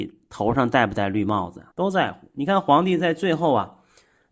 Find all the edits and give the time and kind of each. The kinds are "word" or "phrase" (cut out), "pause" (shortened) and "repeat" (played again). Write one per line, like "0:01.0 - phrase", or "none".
0:01.7 - pause